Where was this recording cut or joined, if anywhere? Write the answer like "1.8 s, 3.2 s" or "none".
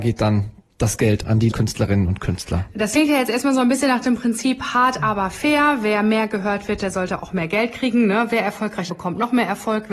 1.5 s, 8.9 s